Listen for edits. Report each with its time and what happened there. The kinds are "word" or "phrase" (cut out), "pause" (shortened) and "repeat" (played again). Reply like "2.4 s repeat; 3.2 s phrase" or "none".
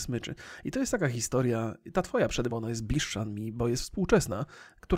2.5 s word